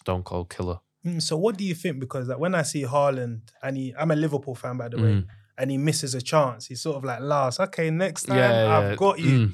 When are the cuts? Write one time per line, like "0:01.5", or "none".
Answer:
none